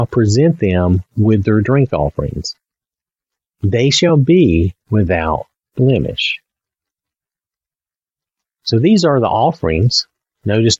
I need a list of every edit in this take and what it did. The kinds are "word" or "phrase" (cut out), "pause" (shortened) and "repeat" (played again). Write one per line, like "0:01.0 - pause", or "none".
none